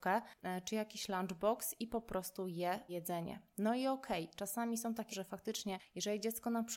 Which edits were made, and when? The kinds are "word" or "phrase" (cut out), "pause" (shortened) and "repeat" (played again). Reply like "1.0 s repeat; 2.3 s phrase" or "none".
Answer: 2.9 s word; 5.1 s word